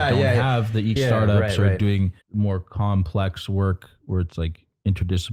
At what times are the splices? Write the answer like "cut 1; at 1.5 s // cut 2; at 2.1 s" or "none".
cut 1; at 1.0 s // cut 2; at 2.2 s